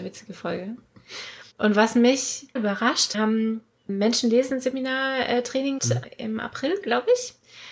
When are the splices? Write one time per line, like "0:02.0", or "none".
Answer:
0:01.5
0:02.6
0:03.1
0:05.8

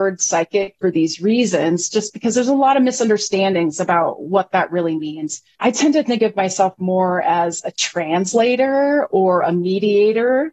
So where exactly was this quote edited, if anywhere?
none

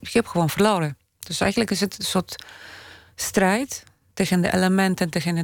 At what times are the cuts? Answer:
none

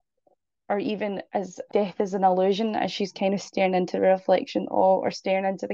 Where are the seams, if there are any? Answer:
0:01.3
0:01.7

